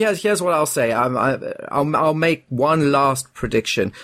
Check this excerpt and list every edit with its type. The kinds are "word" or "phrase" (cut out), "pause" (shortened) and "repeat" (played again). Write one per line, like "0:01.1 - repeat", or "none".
none

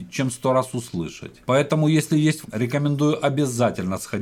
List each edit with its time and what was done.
0:01.4 - pause
0:02.4 - word

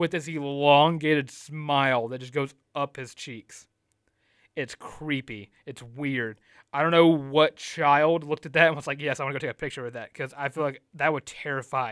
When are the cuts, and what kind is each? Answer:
none

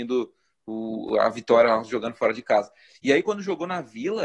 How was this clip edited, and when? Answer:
none

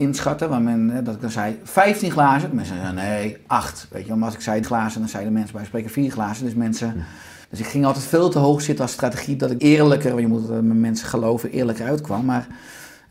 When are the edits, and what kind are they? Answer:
0:04.6 - word
0:07.4 - pause
0:09.6 - word

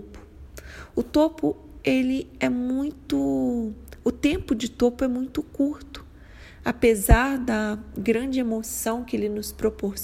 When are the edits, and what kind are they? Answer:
none

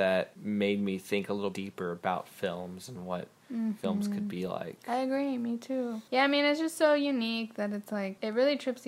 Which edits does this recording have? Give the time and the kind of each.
0:01.5 - word

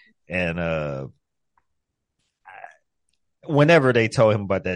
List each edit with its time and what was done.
none

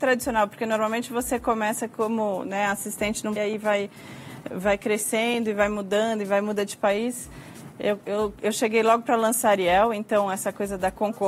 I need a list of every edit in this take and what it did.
0:03.4 - phrase

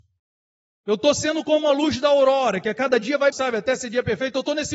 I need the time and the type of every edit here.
0:03.3 - word

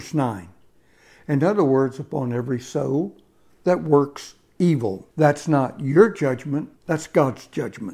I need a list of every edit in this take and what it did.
0:05.1 - pause
0:06.8 - pause

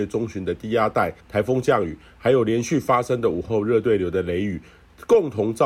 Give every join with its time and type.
0:01.2 - pause

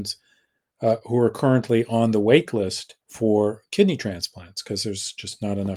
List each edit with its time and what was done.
0:03.0 - pause

